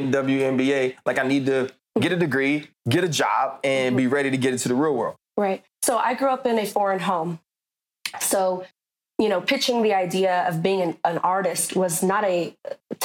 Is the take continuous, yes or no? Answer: yes